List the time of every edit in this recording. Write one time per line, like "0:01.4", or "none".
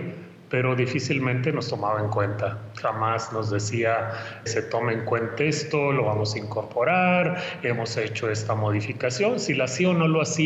0:04.5